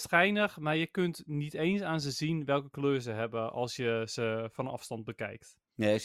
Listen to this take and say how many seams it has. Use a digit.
0